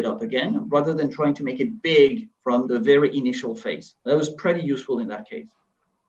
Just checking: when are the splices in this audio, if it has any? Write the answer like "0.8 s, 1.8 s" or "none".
2.7 s, 4.0 s